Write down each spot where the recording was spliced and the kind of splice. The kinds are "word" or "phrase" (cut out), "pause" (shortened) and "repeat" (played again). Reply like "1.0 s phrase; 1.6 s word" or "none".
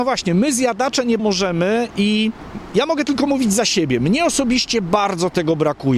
1.2 s word